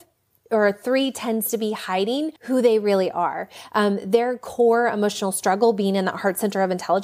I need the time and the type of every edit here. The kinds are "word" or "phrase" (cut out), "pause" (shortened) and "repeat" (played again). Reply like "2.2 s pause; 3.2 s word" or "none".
2.4 s pause